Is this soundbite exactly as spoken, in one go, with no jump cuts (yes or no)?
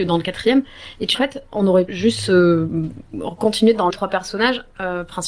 no